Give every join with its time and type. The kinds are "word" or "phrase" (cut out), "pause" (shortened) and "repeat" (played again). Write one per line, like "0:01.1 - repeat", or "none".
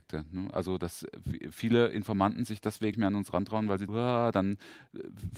0:02.9 - word
0:03.9 - word